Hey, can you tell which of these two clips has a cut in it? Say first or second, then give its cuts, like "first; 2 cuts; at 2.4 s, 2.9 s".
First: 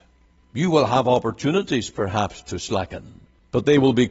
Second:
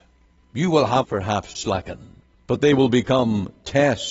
second; 2 cuts; at 1.0 s, 1.5 s